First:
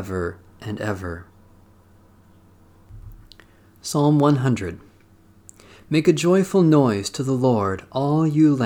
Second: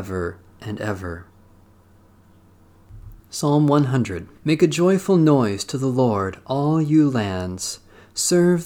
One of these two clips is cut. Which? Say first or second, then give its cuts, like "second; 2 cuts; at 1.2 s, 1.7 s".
second; 2 cuts; at 3.2 s, 4.4 s